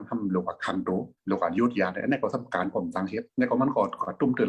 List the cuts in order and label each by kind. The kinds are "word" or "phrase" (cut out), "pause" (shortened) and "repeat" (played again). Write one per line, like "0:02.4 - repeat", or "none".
0:01.2 - pause
0:03.3 - pause